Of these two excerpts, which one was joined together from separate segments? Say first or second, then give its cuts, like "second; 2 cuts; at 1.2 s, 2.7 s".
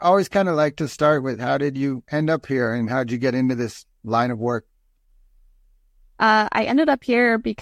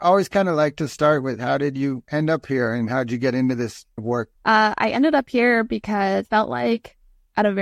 second; 3 cuts; at 4.0 s, 4.3 s, 6.2 s